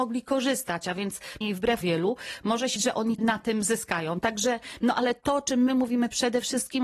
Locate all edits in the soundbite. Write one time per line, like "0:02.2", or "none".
0:01.4
0:01.8
0:02.8
0:03.2